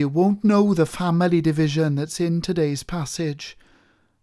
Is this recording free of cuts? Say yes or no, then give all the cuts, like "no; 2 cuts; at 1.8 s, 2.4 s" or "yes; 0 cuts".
yes; 0 cuts